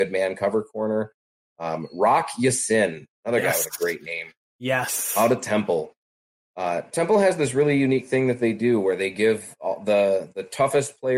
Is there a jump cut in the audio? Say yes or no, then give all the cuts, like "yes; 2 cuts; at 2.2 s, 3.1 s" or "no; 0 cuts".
no; 0 cuts